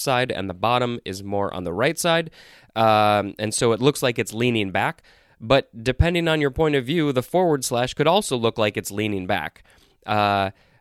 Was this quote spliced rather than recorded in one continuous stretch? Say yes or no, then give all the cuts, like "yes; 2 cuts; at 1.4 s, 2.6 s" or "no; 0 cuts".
no; 0 cuts